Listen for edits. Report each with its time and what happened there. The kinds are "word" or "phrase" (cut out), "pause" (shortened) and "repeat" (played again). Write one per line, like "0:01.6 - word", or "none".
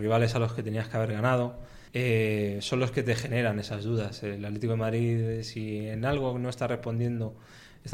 0:01.9 - pause